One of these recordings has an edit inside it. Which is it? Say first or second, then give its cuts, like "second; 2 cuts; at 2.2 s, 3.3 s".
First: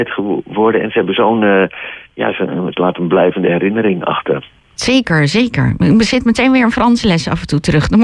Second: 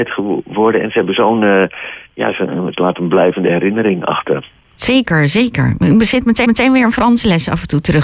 second; 1 cut; at 6.4 s